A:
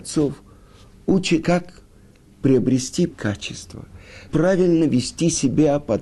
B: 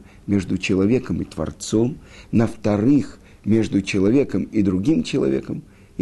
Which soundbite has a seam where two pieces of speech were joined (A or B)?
A